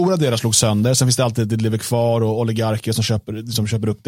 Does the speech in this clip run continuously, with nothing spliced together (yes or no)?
yes